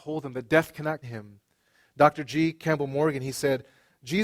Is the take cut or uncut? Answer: cut